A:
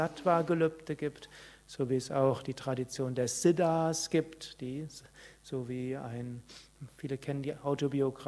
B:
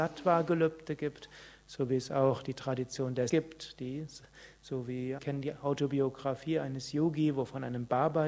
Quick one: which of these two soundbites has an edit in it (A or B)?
B